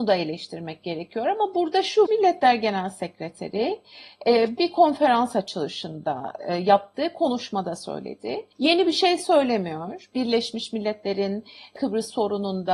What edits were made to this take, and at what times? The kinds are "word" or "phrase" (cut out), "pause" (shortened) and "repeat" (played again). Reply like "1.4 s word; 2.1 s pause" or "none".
2.1 s phrase; 4.6 s word; 8.5 s pause